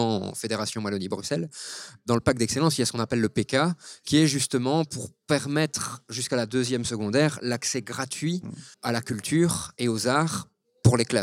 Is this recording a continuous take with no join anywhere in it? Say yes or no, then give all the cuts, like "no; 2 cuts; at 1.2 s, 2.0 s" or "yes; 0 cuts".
no; 1 cut; at 8.7 s